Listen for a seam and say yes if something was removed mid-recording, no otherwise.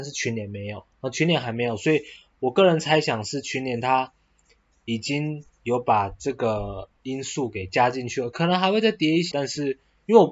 yes